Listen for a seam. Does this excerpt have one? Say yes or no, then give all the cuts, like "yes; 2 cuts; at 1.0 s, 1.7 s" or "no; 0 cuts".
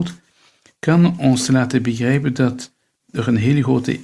no; 0 cuts